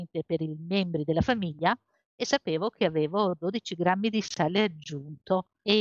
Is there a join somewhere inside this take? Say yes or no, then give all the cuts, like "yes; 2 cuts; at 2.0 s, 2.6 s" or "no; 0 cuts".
no; 0 cuts